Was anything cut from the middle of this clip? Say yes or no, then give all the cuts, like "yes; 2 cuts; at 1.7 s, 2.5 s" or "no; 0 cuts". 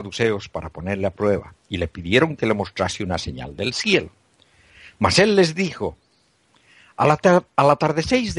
no; 0 cuts